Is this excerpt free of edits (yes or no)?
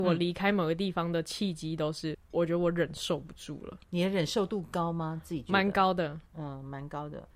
no